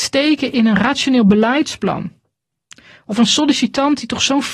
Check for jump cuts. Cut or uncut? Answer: uncut